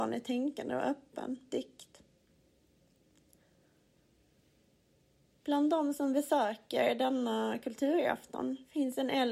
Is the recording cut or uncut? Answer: cut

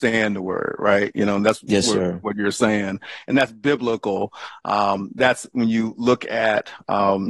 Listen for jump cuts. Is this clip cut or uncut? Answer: uncut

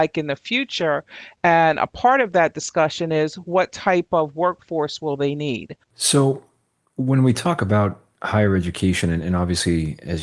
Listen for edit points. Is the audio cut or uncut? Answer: cut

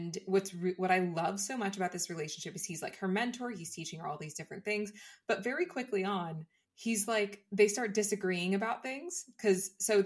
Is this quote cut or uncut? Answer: cut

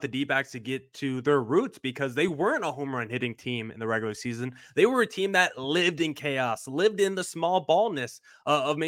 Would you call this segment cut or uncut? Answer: uncut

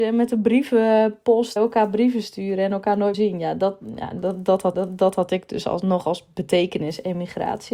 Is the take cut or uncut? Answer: cut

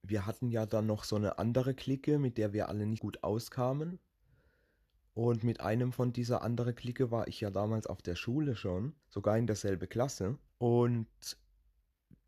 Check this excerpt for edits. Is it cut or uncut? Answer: cut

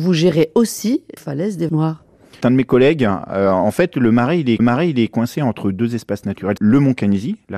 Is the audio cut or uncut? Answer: cut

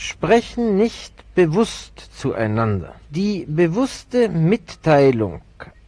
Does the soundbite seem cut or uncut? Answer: cut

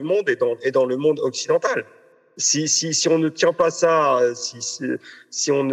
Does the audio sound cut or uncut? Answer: uncut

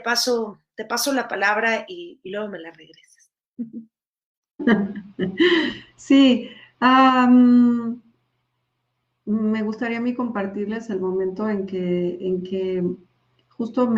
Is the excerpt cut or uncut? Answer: uncut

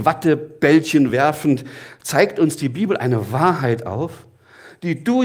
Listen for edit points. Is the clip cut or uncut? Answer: uncut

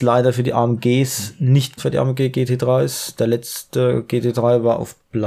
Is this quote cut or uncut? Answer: cut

